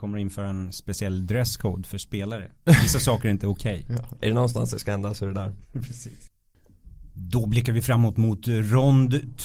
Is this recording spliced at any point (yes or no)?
no